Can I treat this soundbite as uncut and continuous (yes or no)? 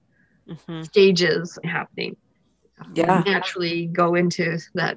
no